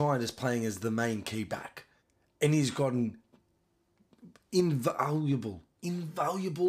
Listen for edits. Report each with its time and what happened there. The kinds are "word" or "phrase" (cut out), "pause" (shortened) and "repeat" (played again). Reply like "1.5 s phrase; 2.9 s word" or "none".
2.0 s pause